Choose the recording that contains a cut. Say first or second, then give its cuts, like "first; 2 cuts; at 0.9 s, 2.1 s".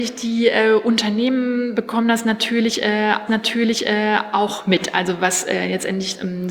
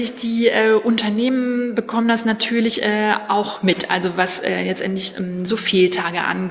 first; 1 cut; at 3.3 s